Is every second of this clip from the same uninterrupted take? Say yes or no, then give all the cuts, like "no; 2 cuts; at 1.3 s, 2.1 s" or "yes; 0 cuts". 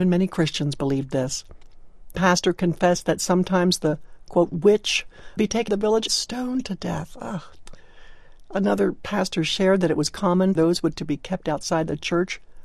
no; 6 cuts; at 2.1 s, 5.4 s, 5.7 s, 6.1 s, 10.6 s, 10.9 s